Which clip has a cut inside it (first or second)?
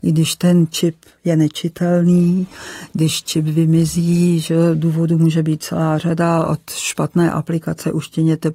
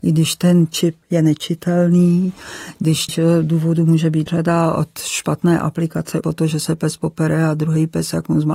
second